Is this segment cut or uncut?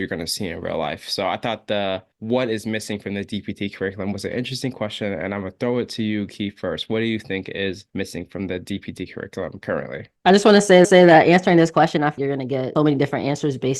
cut